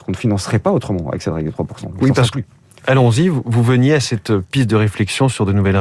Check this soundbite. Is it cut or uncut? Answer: uncut